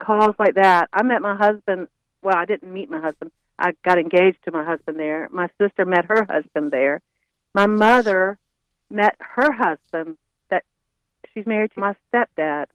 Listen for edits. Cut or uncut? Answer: cut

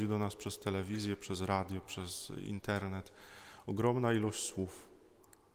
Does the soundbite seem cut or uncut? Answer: uncut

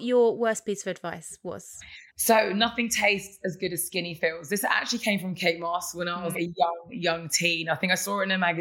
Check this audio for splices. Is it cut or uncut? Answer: cut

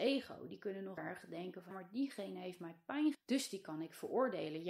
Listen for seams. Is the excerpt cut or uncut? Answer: cut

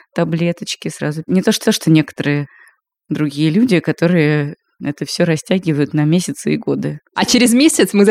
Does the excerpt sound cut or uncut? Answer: cut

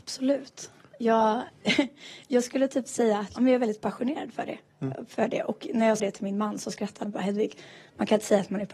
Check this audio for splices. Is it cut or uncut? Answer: cut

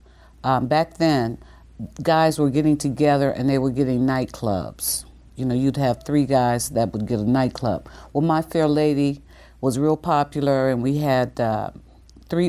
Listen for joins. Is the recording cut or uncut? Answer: uncut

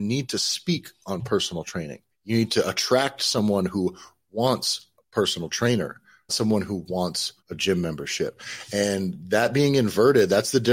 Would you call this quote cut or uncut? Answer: cut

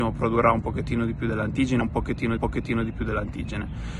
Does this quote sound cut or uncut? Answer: cut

